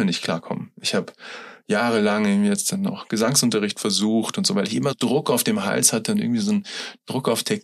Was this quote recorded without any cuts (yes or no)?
no